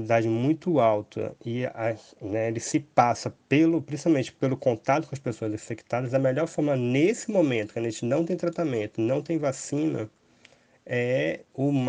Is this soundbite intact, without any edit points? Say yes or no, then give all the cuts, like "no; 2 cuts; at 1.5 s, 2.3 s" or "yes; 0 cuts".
yes; 0 cuts